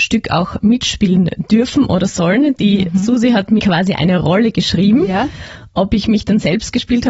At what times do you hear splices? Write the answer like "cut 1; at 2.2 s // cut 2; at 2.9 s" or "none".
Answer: cut 1; at 3.6 s